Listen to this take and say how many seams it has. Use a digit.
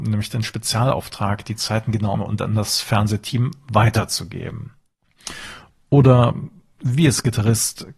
1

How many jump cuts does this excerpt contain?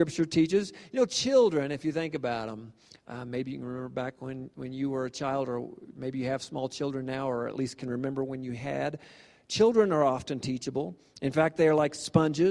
0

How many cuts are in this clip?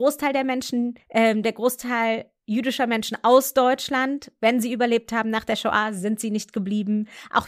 1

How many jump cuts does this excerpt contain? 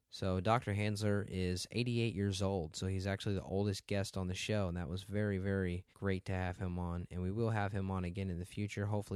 1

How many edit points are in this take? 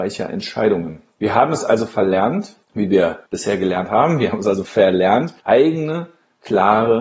4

